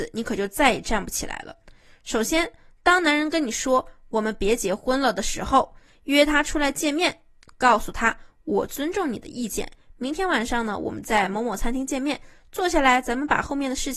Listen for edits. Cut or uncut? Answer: uncut